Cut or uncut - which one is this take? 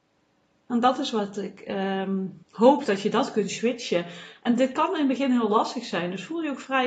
cut